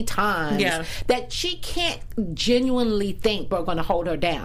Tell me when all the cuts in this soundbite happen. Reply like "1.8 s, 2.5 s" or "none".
3.5 s